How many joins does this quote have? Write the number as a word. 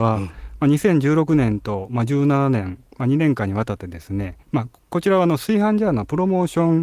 two